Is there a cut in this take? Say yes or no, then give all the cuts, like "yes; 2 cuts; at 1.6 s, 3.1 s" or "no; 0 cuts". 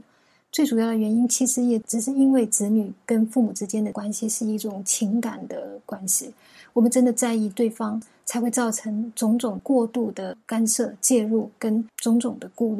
no; 0 cuts